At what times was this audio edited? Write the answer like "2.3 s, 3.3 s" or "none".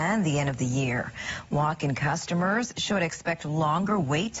none